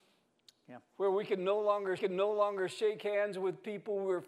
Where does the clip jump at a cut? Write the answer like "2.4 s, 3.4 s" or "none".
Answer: 2.0 s